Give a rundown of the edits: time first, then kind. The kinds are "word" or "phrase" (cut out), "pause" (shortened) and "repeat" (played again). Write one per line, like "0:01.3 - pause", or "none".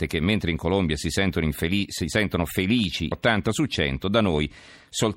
0:03.1 - word